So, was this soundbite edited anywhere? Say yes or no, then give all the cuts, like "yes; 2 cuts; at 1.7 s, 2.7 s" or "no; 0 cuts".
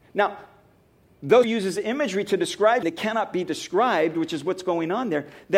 yes; 2 cuts; at 1.4 s, 2.8 s